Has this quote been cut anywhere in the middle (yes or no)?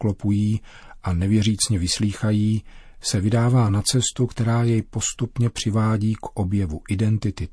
no